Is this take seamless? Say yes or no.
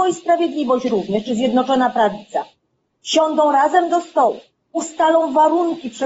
yes